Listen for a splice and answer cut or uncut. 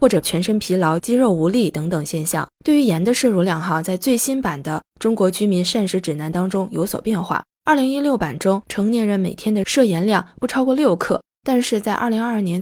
cut